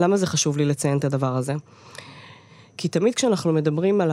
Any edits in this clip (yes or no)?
no